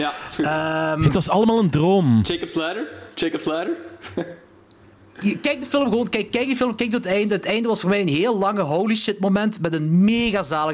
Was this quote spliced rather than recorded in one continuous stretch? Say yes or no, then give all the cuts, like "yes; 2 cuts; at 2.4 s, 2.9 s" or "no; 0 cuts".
no; 0 cuts